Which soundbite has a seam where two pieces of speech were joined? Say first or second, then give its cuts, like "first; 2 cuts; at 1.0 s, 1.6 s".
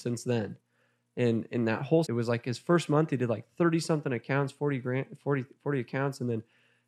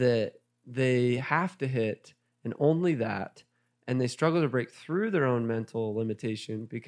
first; 1 cut; at 2.0 s